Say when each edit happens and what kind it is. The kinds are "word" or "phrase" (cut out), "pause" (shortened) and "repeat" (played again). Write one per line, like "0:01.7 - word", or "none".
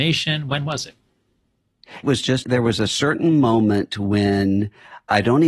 0:02.0 - word
0:02.4 - word